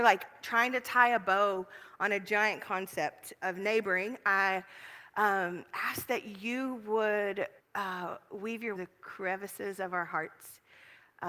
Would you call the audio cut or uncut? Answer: cut